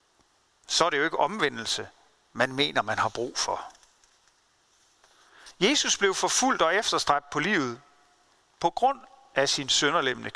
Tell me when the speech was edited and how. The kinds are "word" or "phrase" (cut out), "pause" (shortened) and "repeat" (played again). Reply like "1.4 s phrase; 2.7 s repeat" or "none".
none